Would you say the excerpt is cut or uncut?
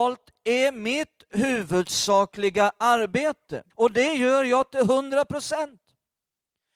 cut